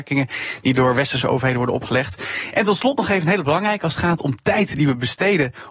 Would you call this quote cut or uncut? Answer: uncut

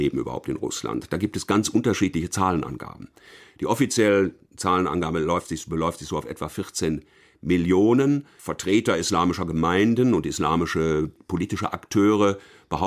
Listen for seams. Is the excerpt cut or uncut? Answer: uncut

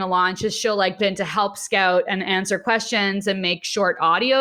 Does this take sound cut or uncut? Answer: cut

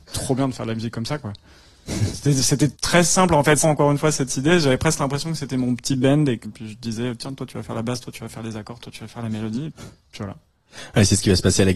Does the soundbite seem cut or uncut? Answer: cut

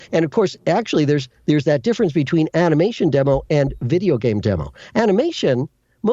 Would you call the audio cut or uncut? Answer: cut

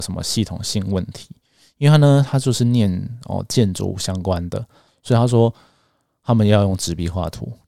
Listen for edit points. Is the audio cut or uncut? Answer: uncut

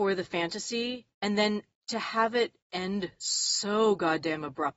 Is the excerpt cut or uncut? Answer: cut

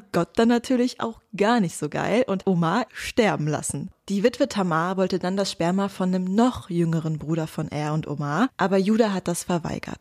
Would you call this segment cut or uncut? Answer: cut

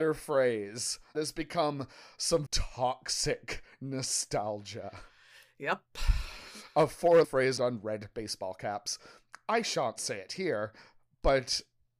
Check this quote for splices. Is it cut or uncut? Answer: cut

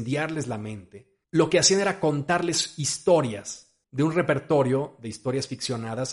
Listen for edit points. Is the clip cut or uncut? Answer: cut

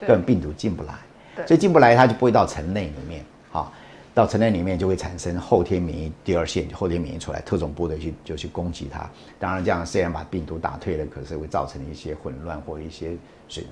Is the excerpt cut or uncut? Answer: uncut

